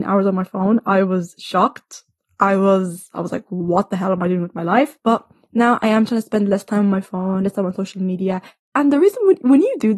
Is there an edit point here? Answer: no; 0 cuts

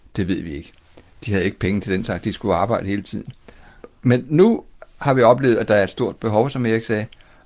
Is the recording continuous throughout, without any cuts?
yes; 0 cuts

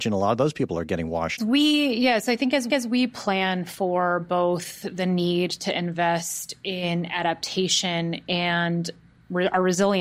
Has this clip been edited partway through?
yes; 2 cuts; at 1.4 s, 2.7 s

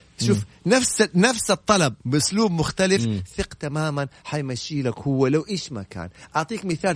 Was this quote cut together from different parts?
yes; 1 cut; at 2.0 s

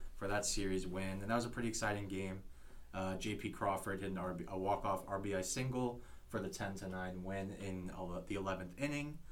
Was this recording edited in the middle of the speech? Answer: no; 0 cuts

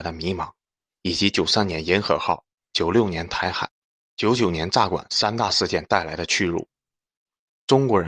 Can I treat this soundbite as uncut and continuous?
yes; 0 cuts

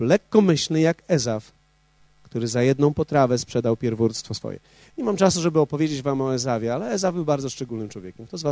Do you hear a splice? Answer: no; 0 cuts

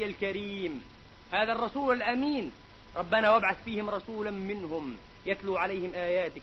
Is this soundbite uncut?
yes; 0 cuts

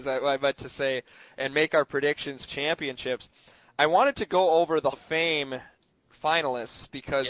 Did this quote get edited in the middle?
yes; 2 cuts; at 2.5 s, 4.9 s

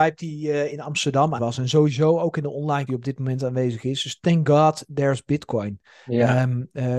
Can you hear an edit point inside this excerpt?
yes; 2 cuts; at 1.4 s, 2.9 s

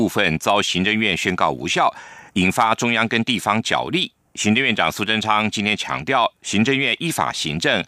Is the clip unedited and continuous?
no; 1 cut; at 2.3 s

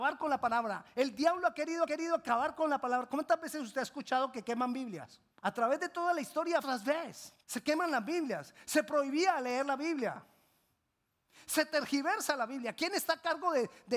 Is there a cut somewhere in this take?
yes; 4 cuts; at 1.8 s, 5.3 s, 6.6 s, 7.4 s

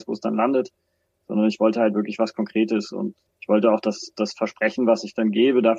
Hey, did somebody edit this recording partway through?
yes; 1 cut; at 3.3 s

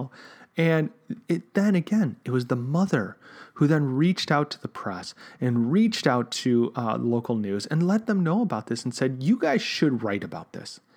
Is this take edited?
no; 0 cuts

